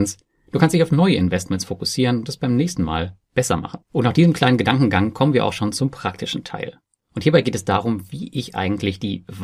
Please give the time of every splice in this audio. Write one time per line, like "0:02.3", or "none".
0:03.8